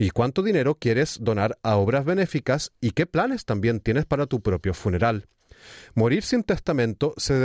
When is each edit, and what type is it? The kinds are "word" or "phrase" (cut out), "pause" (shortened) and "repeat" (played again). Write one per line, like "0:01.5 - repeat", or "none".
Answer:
none